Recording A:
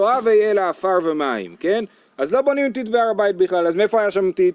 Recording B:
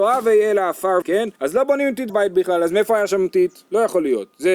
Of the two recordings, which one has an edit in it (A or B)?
B